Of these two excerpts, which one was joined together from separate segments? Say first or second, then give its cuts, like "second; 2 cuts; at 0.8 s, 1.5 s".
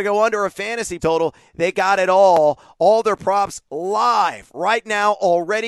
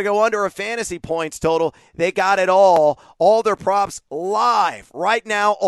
first; 1 cut; at 1.0 s